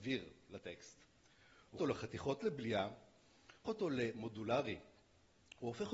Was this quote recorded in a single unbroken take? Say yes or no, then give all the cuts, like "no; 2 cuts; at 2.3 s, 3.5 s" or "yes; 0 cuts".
no; 3 cuts; at 1.8 s, 2.4 s, 3.7 s